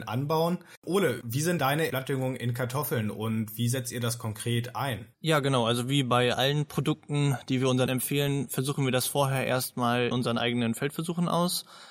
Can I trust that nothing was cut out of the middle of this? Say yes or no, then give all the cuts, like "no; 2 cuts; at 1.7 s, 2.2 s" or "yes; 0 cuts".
no; 5 cuts; at 1.6 s, 1.9 s, 5.1 s, 7.9 s, 10.1 s